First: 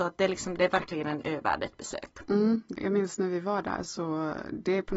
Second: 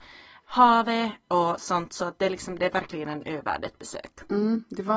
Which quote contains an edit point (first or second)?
first